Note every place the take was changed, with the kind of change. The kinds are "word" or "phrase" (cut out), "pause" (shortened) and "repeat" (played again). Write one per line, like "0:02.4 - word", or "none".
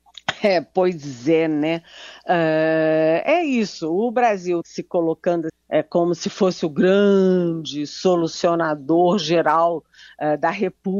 0:04.6 - word
0:05.5 - word